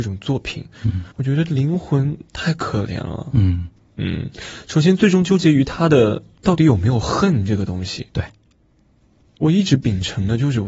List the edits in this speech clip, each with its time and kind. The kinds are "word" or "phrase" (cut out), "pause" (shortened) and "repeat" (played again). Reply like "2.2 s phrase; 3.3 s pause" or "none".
1.1 s pause; 2.3 s pause; 3.8 s pause; 9.0 s pause